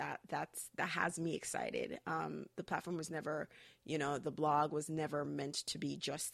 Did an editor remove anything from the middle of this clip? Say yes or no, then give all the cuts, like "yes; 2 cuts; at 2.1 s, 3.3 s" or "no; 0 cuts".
no; 0 cuts